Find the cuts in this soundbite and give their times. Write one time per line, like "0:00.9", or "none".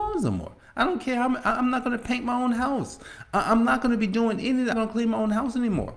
0:04.7